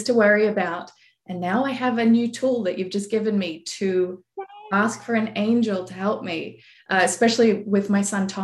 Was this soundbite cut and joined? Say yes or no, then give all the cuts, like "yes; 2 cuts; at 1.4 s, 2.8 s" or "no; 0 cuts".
no; 0 cuts